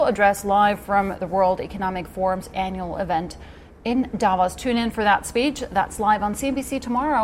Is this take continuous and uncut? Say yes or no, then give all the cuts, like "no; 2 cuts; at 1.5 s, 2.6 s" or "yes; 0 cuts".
yes; 0 cuts